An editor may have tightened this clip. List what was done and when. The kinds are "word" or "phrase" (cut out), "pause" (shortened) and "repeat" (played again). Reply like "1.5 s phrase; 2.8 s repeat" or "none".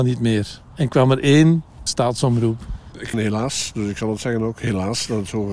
1.9 s word; 3.1 s phrase